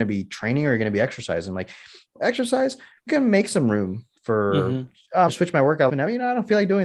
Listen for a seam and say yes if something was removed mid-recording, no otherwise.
yes